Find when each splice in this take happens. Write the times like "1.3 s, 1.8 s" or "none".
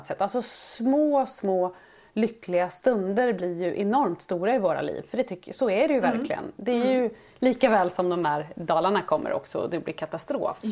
none